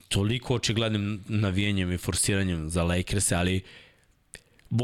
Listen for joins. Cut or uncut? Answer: uncut